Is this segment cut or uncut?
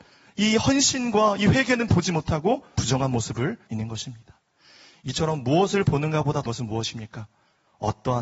cut